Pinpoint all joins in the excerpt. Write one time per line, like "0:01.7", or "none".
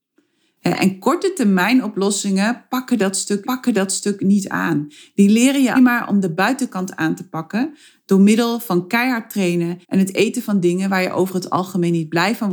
0:03.4
0:05.7
0:09.8